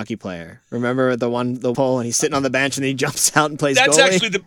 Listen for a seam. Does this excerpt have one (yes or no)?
yes